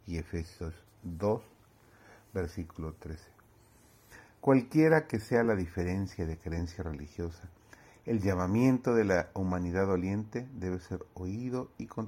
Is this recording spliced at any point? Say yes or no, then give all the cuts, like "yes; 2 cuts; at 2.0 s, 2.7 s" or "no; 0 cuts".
no; 0 cuts